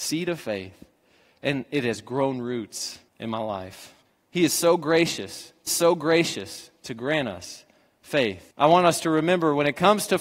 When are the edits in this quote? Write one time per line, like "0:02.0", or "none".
0:03.1
0:04.1
0:05.7
0:08.5